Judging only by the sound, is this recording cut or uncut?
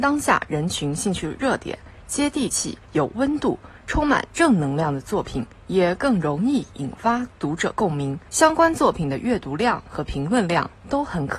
cut